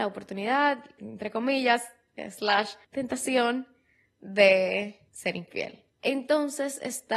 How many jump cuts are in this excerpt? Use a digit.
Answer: 4